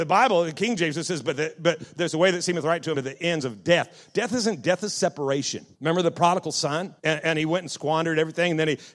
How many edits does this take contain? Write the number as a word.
five